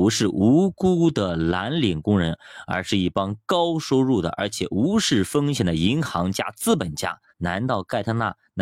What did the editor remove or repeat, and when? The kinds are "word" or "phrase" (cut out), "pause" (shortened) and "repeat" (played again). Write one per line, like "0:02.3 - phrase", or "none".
0:07.3 - pause

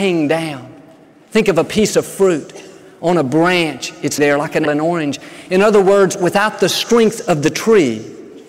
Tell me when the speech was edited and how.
0:04.2 - word
0:04.7 - word

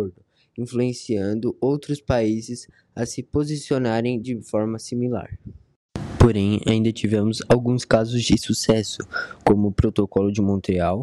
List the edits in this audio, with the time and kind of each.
none

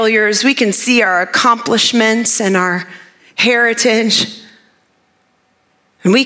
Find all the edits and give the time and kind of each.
none

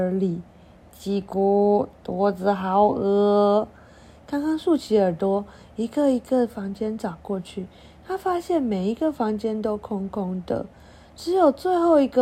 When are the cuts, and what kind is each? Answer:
none

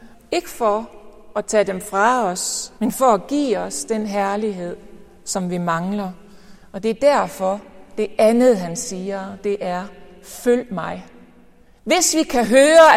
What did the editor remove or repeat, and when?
0:02.8 - pause

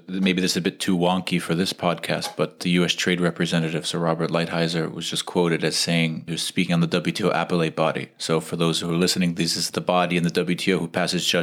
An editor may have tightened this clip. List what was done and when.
0:02.6 - word

